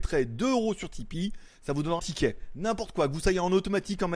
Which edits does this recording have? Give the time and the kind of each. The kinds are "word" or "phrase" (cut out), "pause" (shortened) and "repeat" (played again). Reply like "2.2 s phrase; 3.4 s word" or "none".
2.0 s word